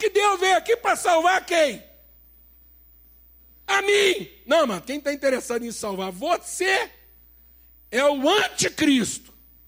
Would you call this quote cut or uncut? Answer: uncut